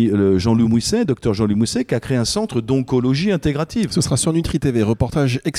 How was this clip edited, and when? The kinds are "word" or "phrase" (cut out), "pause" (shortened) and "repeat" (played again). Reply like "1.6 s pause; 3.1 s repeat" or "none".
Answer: none